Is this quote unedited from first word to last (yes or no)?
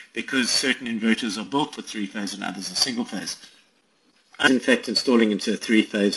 no